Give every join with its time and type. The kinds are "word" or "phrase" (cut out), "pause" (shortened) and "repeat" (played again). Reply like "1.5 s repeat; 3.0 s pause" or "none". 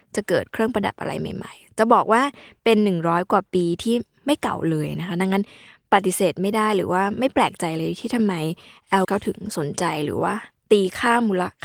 9.0 s word